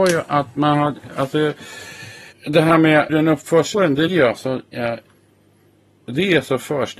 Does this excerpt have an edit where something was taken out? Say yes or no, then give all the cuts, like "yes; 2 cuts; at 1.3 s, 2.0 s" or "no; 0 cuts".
yes; 4 cuts; at 2.3 s, 3.1 s, 3.7 s, 4.1 s